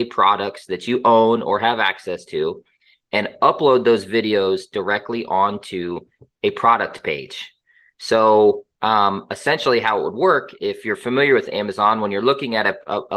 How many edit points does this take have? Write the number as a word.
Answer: zero